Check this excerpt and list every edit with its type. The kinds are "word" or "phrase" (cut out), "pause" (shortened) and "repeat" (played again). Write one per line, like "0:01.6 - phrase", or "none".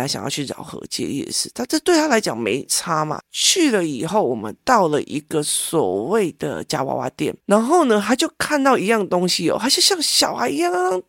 0:07.4 - pause